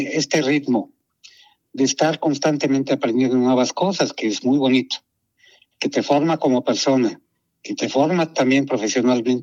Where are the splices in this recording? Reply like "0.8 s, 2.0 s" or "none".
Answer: none